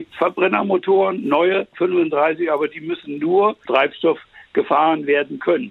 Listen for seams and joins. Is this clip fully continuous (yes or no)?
no